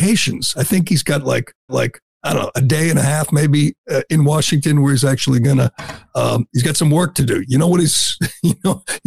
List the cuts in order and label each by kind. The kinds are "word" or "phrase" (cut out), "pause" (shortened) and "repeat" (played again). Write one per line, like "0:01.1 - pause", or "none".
0:01.7 - repeat